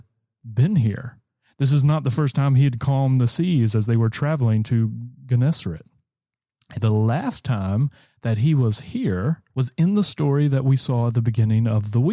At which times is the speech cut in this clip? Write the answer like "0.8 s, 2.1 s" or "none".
6.8 s, 9.5 s